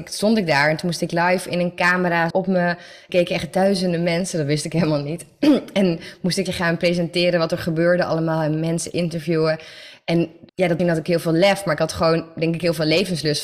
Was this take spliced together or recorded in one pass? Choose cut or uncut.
cut